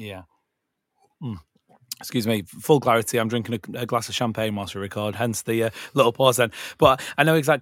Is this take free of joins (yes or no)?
yes